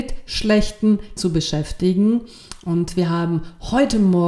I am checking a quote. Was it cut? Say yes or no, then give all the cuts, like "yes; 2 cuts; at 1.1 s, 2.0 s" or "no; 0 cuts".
yes; 1 cut; at 1.2 s